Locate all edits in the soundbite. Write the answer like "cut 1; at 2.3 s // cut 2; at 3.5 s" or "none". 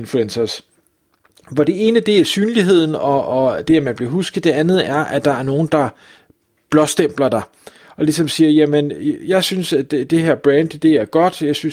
none